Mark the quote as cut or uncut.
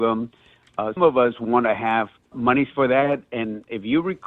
cut